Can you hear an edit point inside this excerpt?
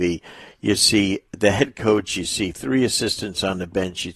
no; 0 cuts

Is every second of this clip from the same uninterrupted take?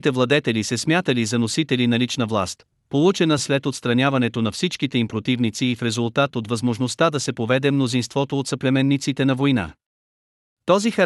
yes; 0 cuts

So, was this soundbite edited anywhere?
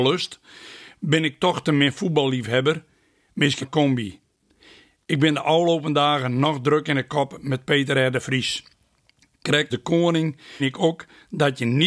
yes; 3 cuts; at 3.6 s, 9.7 s, 10.6 s

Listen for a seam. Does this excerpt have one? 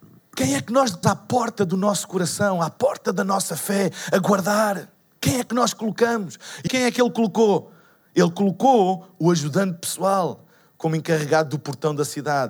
yes; 2 cuts; at 1.0 s, 6.7 s

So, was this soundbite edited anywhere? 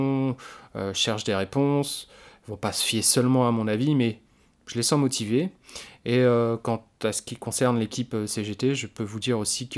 no; 0 cuts

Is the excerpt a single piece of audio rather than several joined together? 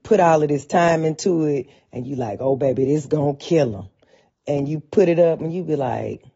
yes; 0 cuts

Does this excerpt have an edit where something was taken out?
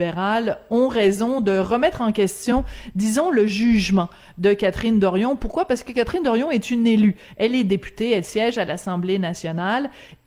no; 0 cuts

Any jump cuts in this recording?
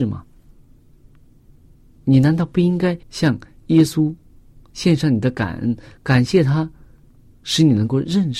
yes; 1 cut; at 3.0 s

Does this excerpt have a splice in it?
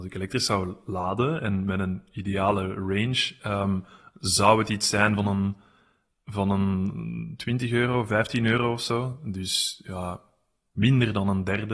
no; 0 cuts

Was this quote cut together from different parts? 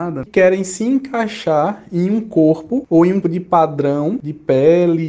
yes; 1 cut; at 3.2 s

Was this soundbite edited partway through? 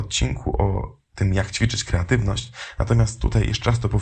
no; 0 cuts

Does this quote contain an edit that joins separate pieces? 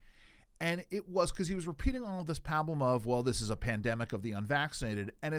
no; 0 cuts

